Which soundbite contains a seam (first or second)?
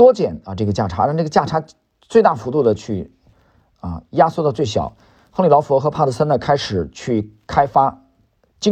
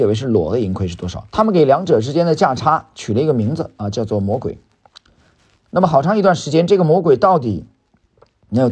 second